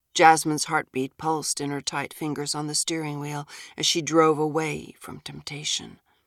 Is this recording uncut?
yes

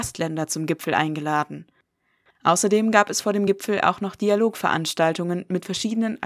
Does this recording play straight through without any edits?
yes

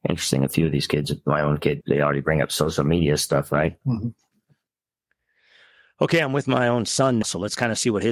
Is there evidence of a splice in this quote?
yes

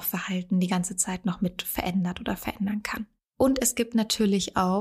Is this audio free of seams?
yes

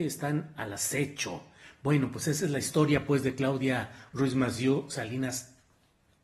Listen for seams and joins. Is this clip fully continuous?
yes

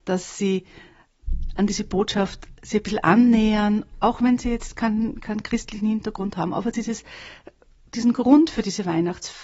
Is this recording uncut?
yes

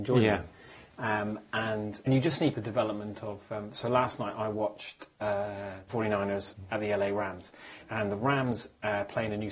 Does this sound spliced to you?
yes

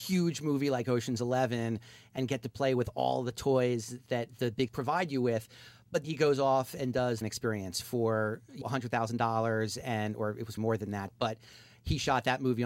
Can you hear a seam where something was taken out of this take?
yes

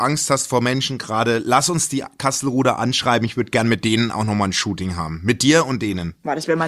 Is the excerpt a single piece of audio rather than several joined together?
yes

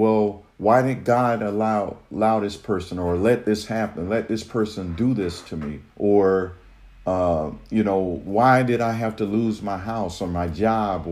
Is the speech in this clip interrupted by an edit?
yes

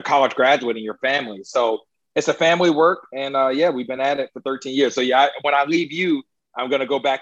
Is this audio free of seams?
yes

